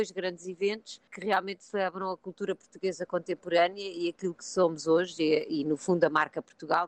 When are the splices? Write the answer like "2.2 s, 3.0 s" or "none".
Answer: 4.4 s